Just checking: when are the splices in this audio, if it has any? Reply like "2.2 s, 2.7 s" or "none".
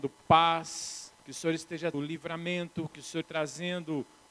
1.1 s, 1.9 s, 3.2 s